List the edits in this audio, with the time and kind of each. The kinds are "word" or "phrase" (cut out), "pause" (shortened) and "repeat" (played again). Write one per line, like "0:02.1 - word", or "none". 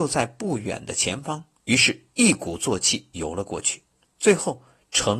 0:04.0 - pause